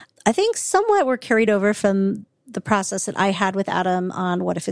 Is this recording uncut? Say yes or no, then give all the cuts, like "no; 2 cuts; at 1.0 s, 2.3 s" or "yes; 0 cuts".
yes; 0 cuts